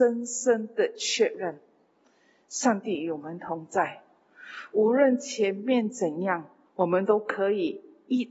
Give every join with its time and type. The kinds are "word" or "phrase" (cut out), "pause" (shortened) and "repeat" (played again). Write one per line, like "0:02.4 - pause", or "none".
0:06.7 - pause